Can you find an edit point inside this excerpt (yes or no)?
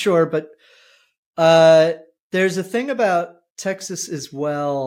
no